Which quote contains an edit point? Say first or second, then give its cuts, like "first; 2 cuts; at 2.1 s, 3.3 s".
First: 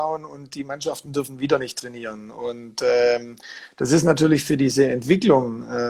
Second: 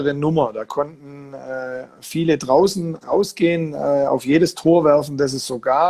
second; 1 cut; at 3.0 s